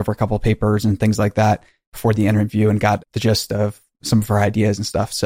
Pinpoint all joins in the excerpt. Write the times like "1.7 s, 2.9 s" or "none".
none